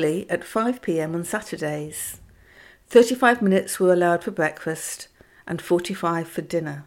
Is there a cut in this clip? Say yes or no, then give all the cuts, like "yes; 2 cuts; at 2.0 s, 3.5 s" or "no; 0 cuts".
no; 0 cuts